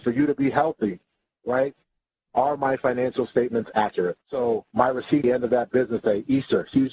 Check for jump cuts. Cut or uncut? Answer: cut